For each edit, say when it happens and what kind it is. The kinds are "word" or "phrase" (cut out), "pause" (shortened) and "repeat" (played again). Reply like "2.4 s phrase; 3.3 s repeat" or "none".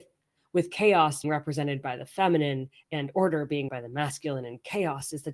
1.2 s word; 2.8 s word; 3.7 s word